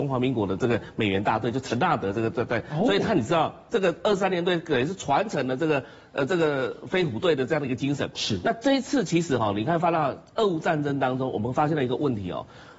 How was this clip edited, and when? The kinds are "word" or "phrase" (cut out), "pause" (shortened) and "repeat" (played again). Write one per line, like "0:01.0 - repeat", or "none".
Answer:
none